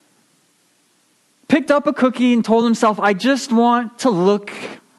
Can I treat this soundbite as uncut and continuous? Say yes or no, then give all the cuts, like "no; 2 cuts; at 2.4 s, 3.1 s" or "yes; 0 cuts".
yes; 0 cuts